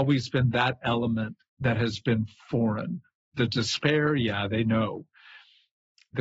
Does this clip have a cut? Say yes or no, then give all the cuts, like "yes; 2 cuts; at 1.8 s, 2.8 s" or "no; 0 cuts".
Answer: no; 0 cuts